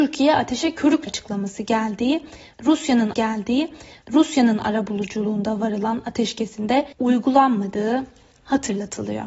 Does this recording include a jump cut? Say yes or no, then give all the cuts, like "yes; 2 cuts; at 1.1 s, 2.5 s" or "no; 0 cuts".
yes; 3 cuts; at 1.1 s, 3.1 s, 6.9 s